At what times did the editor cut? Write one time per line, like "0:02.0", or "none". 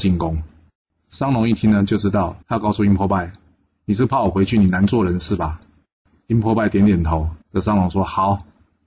0:02.4
0:07.4